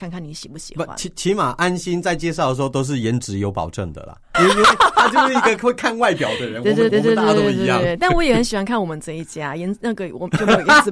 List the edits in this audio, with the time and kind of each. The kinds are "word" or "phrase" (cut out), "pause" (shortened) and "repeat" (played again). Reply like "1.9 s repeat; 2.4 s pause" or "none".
4.3 s word; 6.9 s repeat

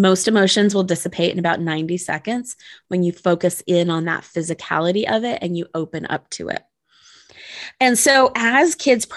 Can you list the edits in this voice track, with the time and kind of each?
none

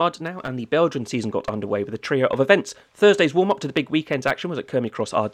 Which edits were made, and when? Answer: none

